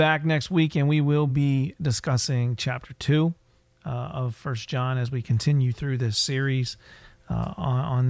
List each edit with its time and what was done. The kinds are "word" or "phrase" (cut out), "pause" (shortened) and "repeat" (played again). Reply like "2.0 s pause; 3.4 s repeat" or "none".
none